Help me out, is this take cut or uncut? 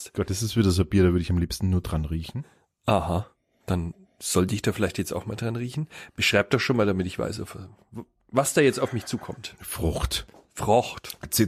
uncut